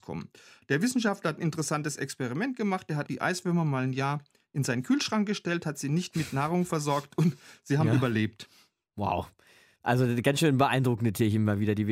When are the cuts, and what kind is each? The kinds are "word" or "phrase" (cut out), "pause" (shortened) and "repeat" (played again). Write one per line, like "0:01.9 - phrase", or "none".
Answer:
0:03.1 - word